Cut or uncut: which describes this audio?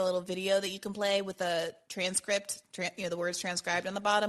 uncut